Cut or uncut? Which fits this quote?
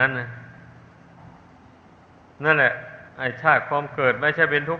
cut